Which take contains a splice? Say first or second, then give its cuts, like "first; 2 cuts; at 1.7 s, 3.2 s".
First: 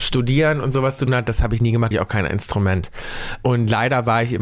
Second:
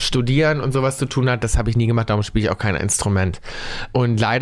first; 2 cuts; at 1.1 s, 1.9 s